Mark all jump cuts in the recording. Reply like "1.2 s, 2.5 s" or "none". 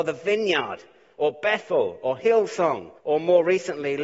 3.0 s